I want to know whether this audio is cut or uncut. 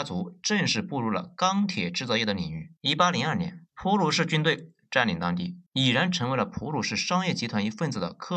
cut